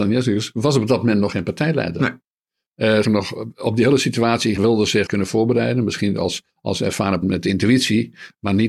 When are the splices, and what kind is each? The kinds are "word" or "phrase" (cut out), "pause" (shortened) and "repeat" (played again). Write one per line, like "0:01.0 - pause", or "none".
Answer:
0:01.3 - word
0:03.0 - word
0:04.6 - word
0:05.1 - phrase
0:06.5 - pause
0:07.2 - phrase